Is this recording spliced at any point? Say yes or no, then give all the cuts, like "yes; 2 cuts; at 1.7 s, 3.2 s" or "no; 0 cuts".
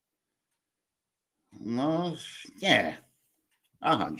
no; 0 cuts